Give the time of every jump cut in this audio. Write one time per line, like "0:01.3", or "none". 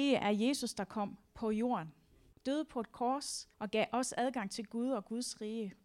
0:02.3
0:03.5